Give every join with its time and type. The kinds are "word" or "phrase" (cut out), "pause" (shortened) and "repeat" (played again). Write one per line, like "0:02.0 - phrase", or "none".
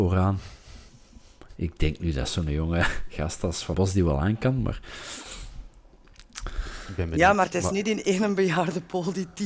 0:03.7 - word